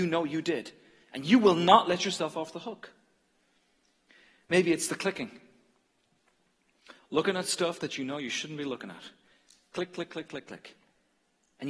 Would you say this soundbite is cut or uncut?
uncut